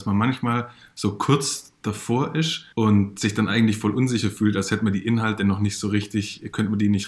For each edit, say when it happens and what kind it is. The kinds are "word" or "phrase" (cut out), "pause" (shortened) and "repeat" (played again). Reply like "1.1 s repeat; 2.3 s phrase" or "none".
2.7 s pause